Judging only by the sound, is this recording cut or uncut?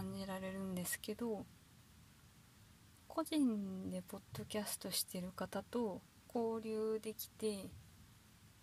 cut